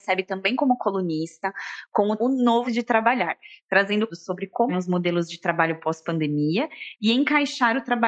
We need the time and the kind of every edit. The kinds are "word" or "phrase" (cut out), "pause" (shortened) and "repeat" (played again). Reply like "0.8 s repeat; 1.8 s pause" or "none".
2.2 s word; 2.6 s word; 4.1 s word; 4.7 s word